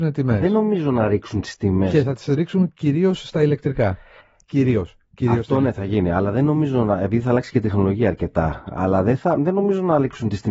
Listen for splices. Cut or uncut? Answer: uncut